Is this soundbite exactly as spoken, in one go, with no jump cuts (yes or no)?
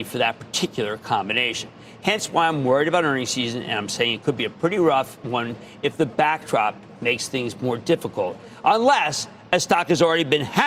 yes